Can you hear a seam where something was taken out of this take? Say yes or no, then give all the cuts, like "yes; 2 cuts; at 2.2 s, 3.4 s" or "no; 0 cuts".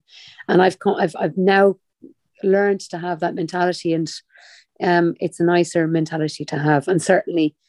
no; 0 cuts